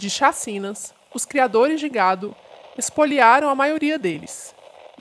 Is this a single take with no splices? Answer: yes; 0 cuts

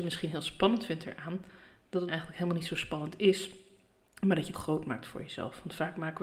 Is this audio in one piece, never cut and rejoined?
no; 2 cuts; at 2.1 s, 4.5 s

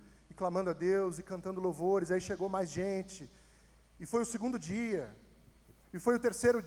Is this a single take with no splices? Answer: yes; 0 cuts

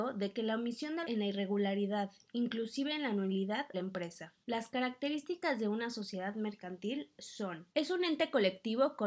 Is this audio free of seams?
no; 4 cuts; at 1.0 s, 3.7 s, 4.4 s, 7.7 s

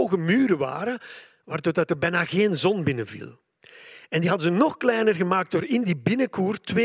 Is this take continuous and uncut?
yes; 0 cuts

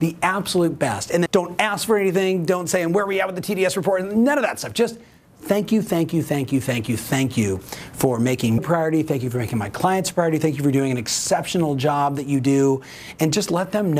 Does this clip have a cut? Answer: yes; 2 cuts; at 1.3 s, 8.6 s

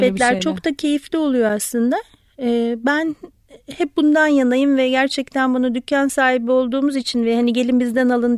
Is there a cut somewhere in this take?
no; 0 cuts

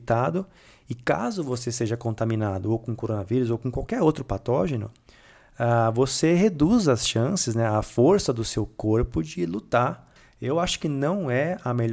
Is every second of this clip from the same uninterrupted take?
yes; 0 cuts

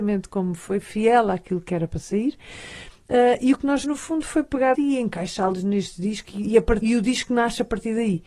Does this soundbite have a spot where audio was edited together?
yes; 3 cuts; at 3.8 s, 4.7 s, 6.8 s

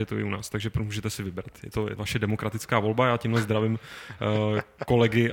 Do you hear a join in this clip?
yes; 1 cut; at 2.0 s

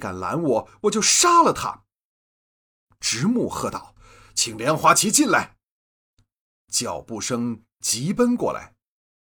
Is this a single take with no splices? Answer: yes; 0 cuts

